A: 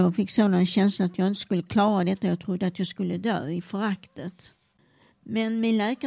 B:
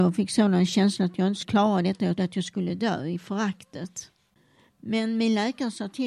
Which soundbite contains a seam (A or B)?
B